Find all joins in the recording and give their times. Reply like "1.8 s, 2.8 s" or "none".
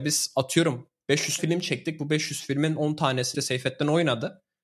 1.4 s, 3.3 s